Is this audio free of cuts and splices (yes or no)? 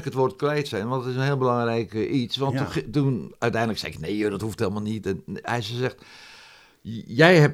yes